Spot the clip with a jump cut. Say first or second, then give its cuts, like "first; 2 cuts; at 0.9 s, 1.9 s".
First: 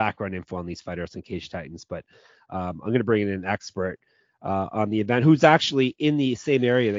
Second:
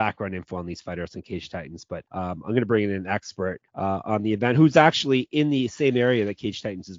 second; 2 cuts; at 2.1 s, 3.7 s